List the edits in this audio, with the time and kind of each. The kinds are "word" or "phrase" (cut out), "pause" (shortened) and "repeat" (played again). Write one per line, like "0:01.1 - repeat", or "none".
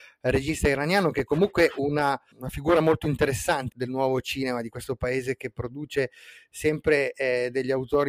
0:02.3 - word
0:03.7 - word